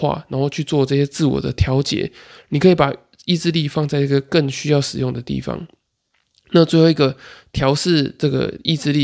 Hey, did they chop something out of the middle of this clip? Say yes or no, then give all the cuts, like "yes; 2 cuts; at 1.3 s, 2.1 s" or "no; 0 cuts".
no; 0 cuts